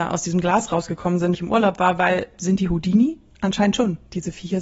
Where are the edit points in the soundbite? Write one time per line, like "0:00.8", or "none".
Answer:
0:01.3
0:02.3